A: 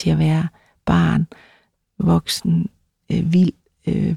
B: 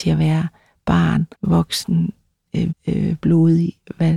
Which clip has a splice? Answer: B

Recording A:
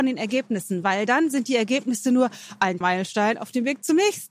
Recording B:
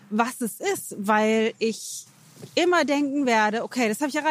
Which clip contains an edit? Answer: A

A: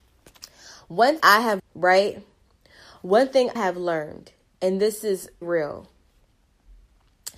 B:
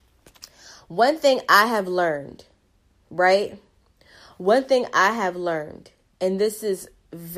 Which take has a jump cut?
A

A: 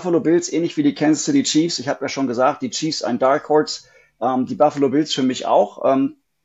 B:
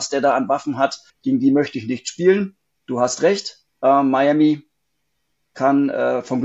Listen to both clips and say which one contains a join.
B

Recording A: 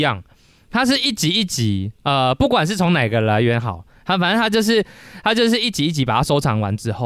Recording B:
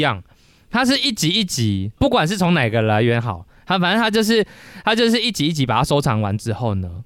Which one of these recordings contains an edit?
B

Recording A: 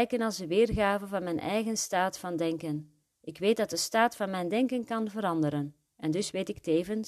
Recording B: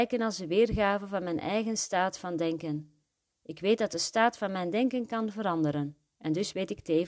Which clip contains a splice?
A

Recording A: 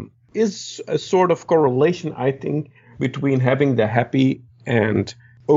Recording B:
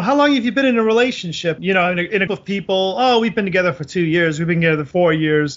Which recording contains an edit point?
B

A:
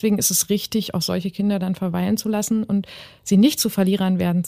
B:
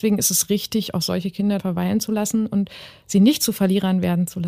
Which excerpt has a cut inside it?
B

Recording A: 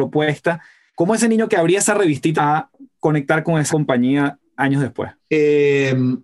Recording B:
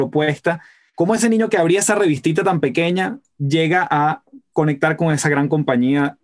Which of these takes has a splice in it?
A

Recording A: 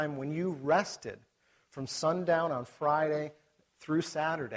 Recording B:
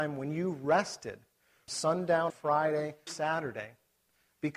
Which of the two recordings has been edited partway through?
B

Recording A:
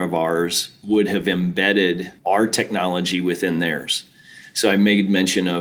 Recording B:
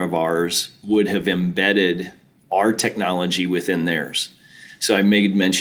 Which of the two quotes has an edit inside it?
A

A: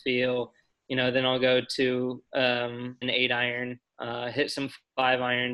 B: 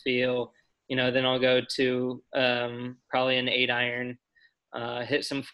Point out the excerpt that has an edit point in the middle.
A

